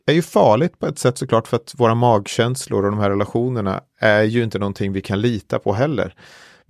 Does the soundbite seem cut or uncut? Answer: uncut